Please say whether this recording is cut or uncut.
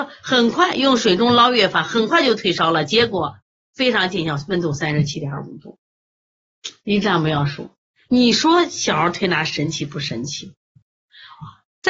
uncut